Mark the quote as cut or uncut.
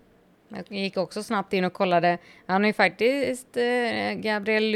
uncut